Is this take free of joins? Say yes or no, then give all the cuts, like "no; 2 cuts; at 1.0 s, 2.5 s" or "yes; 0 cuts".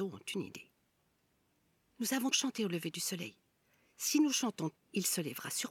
no; 2 cuts; at 2.3 s, 4.8 s